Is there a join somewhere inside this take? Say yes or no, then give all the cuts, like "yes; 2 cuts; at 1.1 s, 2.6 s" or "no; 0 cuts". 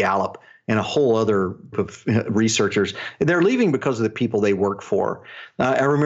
yes; 1 cut; at 1.7 s